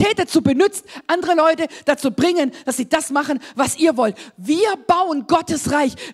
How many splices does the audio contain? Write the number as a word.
zero